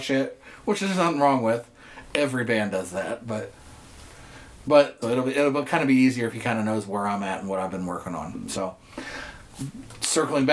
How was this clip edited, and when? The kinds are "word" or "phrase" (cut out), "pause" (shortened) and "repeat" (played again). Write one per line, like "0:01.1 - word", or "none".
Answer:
0:05.0 - word